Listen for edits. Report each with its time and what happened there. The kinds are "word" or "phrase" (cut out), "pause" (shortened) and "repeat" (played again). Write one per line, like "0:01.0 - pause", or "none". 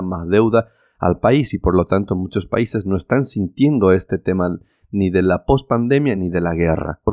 none